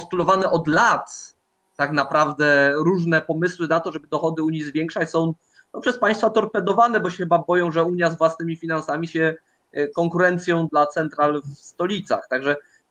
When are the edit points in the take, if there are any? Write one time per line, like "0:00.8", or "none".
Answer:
0:09.1
0:10.7